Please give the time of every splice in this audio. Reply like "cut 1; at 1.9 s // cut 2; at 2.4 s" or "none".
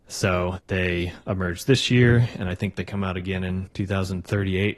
none